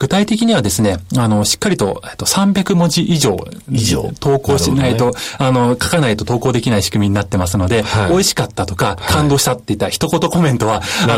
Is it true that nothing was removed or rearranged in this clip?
yes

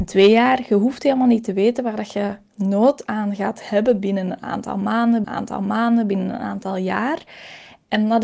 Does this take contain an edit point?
yes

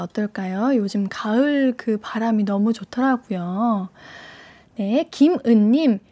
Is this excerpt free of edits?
yes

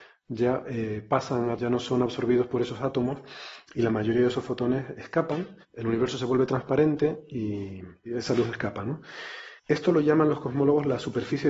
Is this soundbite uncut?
no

